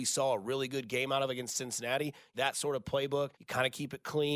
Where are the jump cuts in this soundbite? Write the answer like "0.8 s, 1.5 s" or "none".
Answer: 2.3 s, 3.3 s